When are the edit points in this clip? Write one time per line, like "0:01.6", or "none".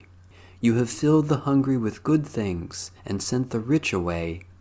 0:03.0